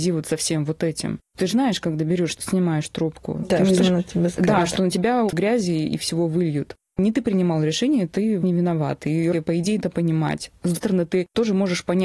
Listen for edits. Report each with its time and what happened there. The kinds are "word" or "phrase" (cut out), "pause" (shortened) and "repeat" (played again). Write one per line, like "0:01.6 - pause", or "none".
0:01.5 - word
0:02.3 - word
0:03.8 - word
0:05.3 - word
0:08.4 - word
0:09.3 - word
0:09.8 - word
0:10.7 - word